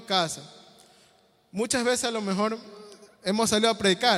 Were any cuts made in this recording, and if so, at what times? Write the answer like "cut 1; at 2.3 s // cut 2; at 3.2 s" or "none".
cut 1; at 3.1 s